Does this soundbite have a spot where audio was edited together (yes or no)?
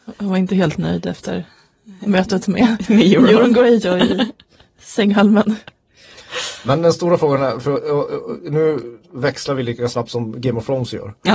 no